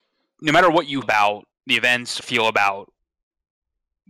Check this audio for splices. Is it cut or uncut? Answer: cut